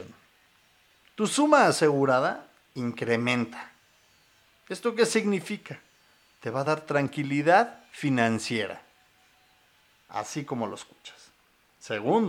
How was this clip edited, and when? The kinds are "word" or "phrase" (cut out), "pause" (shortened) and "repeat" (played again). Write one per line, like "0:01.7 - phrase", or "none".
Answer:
none